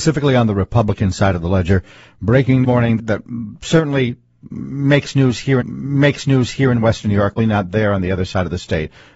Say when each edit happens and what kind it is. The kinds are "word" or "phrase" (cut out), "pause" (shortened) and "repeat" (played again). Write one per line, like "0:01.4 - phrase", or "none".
0:02.6 - phrase
0:03.0 - word
0:05.6 - repeat
0:07.4 - word